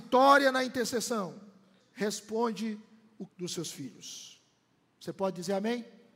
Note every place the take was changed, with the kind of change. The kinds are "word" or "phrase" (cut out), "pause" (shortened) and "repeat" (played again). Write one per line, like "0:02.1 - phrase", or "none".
0:01.8 - word
0:03.3 - word